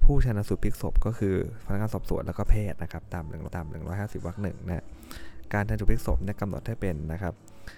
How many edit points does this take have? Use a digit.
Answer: 1